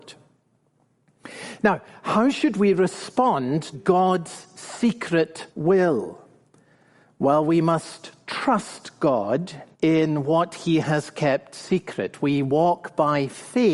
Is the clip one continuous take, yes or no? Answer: no